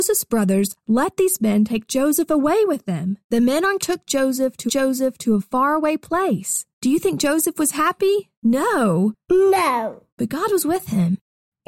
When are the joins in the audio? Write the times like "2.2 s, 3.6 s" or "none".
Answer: 3.2 s, 3.8 s, 4.7 s, 6.7 s, 8.4 s, 10.1 s

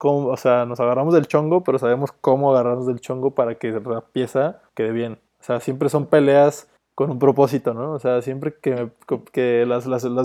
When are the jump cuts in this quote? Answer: 4.7 s, 5.3 s, 6.8 s

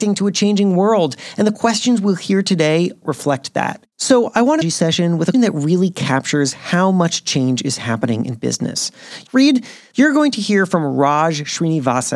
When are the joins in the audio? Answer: 3.0 s, 3.9 s, 4.6 s, 5.3 s

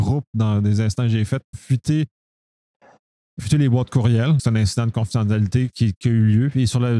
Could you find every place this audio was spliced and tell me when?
1.5 s, 3.4 s, 4.4 s, 6.0 s

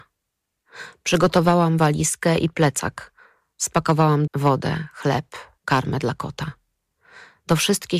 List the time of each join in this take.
4.3 s, 5.6 s

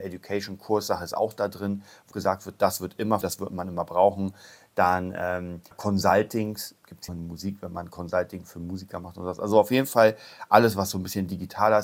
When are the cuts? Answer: 2.1 s, 3.2 s, 5.7 s, 7.1 s

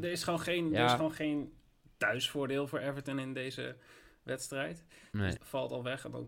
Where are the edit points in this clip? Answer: 5.4 s

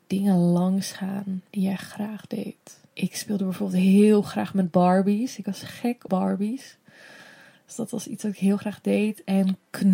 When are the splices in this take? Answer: 1.5 s, 2.9 s, 6.1 s

